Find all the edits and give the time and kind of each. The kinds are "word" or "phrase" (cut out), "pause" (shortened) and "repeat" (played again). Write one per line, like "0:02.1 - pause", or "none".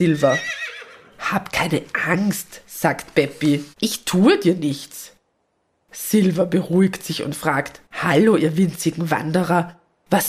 0:03.7 - pause
0:07.8 - pause